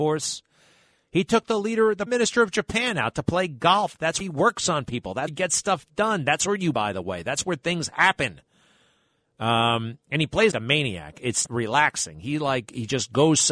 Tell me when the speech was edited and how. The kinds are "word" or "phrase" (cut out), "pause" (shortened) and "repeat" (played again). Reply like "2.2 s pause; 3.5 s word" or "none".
2.1 s word; 4.2 s word; 5.3 s word; 6.7 s word; 10.5 s word; 11.5 s word